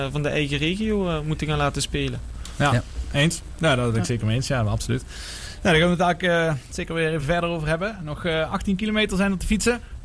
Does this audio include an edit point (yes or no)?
no